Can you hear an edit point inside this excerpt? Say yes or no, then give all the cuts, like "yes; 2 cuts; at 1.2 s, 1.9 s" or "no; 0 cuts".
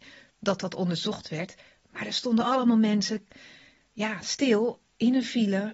no; 0 cuts